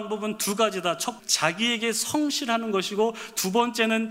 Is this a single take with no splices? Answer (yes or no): no